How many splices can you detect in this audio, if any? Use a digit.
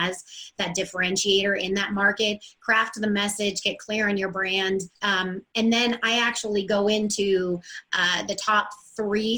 1